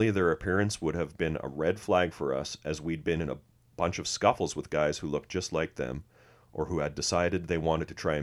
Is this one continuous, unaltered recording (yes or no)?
yes